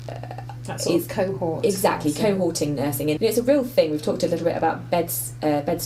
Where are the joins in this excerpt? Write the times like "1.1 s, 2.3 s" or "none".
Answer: 3.2 s

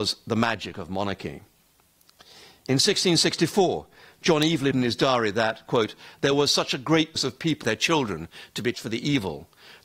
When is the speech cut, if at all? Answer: 4.7 s, 7.2 s, 7.6 s, 8.7 s

